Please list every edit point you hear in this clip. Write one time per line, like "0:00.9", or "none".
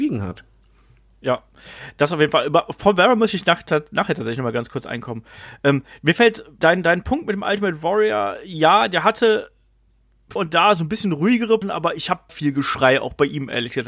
0:06.6
0:10.4
0:11.6
0:12.3